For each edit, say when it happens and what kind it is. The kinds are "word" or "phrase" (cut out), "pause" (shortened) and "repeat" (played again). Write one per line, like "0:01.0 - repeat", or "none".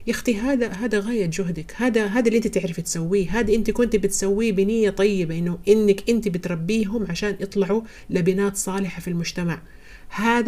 none